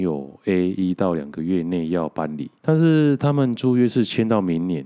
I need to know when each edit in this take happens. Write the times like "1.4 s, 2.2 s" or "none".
2.6 s